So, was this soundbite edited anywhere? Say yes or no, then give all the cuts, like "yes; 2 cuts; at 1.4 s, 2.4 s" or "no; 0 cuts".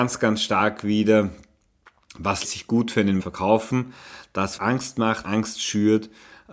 yes; 4 cuts; at 2.4 s, 3.2 s, 4.6 s, 5.2 s